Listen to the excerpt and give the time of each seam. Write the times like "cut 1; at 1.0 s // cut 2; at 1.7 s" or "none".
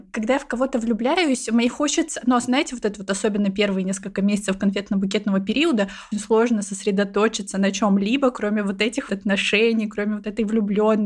cut 1; at 6.1 s // cut 2; at 9.1 s